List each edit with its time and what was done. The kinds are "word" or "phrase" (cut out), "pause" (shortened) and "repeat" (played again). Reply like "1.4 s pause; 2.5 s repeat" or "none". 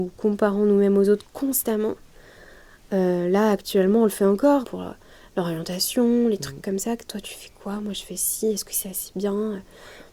4.6 s phrase